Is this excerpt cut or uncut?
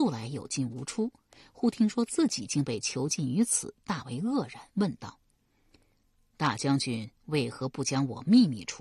uncut